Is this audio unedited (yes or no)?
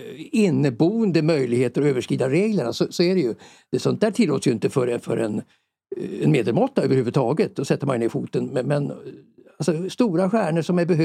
yes